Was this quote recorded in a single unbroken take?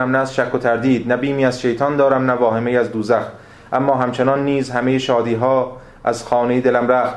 yes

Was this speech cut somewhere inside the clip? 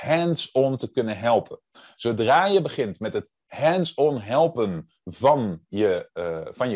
no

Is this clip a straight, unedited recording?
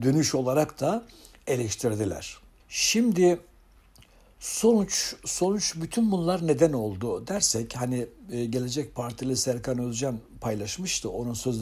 yes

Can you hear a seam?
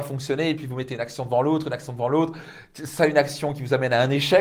no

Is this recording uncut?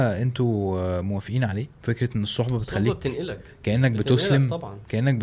no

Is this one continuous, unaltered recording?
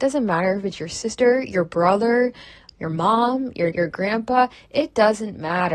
no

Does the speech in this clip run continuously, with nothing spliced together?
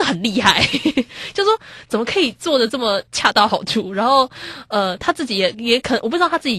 no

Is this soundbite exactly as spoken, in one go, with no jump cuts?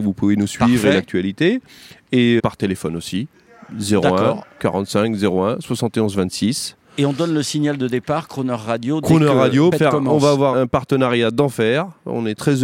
no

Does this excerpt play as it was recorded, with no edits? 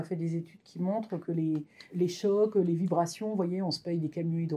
yes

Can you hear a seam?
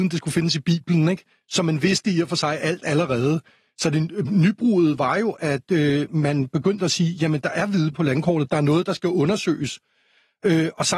yes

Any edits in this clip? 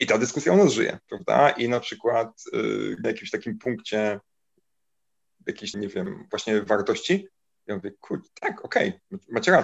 yes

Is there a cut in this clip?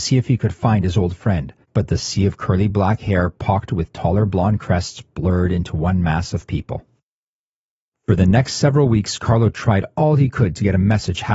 no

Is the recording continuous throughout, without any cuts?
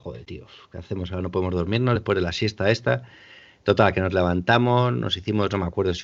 yes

